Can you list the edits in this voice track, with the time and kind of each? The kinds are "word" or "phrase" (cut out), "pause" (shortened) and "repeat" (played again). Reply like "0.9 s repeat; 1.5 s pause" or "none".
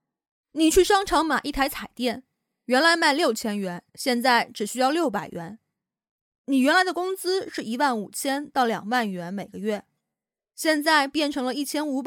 3.9 s pause